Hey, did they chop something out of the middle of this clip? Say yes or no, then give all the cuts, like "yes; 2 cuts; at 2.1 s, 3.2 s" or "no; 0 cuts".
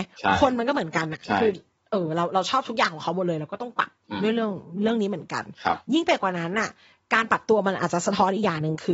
yes; 1 cut; at 1.8 s